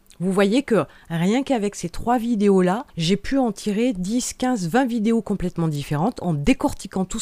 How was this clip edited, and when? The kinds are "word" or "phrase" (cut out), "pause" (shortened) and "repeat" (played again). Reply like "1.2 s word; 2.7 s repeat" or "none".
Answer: 2.9 s pause